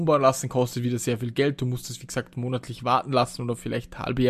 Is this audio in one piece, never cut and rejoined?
yes; 0 cuts

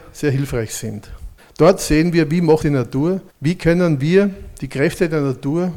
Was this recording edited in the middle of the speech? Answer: yes; 3 cuts; at 1.4 s, 2.6 s, 3.3 s

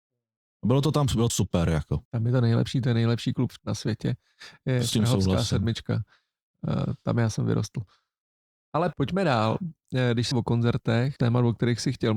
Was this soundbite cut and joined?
yes; 5 cuts; at 1.3 s, 2.1 s, 3.6 s, 10.3 s, 11.2 s

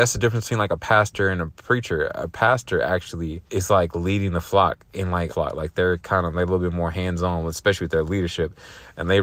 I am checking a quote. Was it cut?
yes; 2 cuts; at 3.5 s, 5.3 s

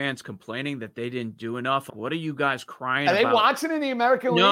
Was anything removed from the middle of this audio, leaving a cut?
yes; 1 cut; at 1.9 s

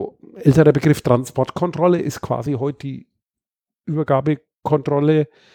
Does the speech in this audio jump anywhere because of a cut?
no; 0 cuts

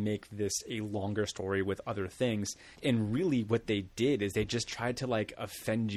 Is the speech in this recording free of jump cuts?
no; 1 cut; at 2.7 s

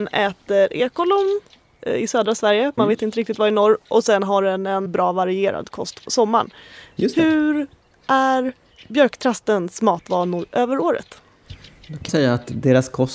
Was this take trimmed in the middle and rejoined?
yes; 4 cuts; at 2.8 s, 4.9 s, 6.1 s, 12.1 s

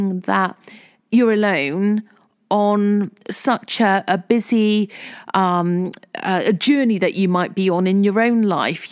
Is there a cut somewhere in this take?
no; 0 cuts

